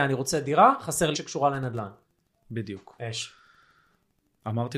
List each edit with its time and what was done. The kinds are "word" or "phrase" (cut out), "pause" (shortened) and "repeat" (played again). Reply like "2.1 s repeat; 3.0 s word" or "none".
1.1 s phrase